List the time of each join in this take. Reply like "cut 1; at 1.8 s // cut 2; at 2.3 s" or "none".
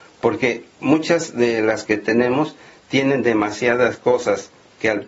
cut 1; at 1.8 s